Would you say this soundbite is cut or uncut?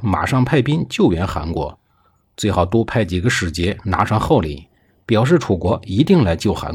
uncut